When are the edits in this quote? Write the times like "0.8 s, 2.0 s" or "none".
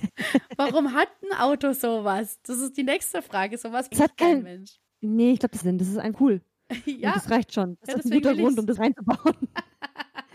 3.9 s, 4.9 s, 5.6 s, 6.1 s, 8.8 s